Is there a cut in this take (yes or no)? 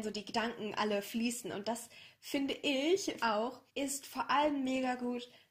yes